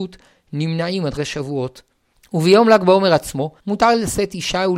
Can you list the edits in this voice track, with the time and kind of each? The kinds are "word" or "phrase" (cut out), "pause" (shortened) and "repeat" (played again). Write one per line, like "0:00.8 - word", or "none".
0:01.2 - word
0:02.1 - pause
0:03.6 - pause